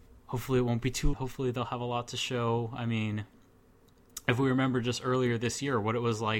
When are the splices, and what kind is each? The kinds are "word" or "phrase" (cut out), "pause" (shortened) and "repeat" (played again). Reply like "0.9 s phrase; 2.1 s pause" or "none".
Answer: 1.1 s phrase